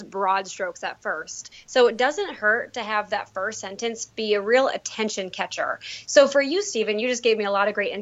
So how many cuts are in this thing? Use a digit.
0